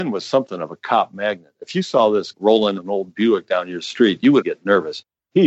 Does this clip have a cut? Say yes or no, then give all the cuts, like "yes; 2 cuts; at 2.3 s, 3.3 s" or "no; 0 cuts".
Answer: yes; 3 cuts; at 2.3 s, 2.8 s, 4.4 s